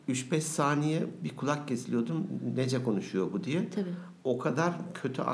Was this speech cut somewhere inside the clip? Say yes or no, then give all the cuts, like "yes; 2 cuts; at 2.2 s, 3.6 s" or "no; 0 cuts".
no; 0 cuts